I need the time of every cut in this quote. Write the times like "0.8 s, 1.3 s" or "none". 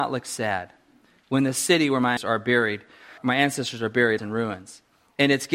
2.2 s, 3.2 s, 4.2 s